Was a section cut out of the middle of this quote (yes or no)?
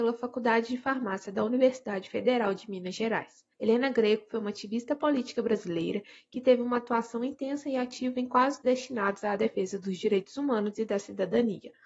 yes